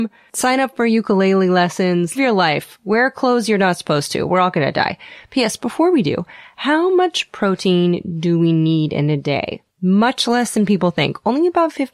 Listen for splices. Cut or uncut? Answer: cut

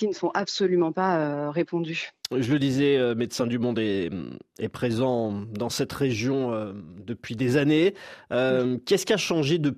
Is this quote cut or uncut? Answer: uncut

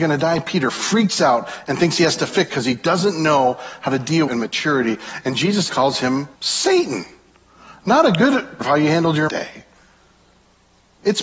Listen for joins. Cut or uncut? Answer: cut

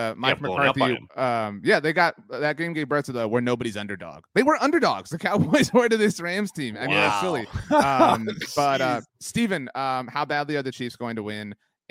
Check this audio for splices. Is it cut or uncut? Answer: cut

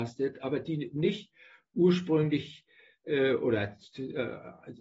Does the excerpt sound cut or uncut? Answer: uncut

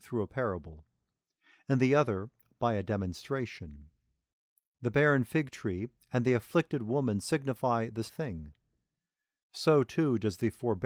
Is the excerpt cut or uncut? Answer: cut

